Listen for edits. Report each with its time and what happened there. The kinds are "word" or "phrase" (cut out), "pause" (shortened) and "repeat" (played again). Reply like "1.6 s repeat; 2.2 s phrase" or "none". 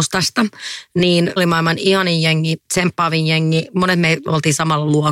1.4 s word